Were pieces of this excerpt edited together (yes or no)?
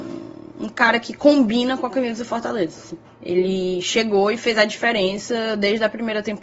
yes